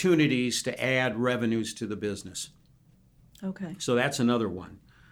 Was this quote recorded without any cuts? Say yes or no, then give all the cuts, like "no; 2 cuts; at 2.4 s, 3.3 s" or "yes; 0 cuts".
yes; 0 cuts